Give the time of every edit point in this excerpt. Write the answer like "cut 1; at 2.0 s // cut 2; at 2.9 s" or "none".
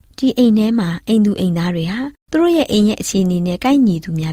cut 1; at 2.2 s